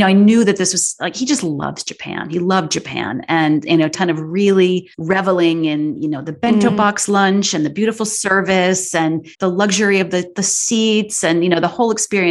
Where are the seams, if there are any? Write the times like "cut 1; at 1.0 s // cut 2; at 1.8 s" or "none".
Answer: cut 1; at 3.9 s // cut 2; at 4.9 s // cut 3; at 9.3 s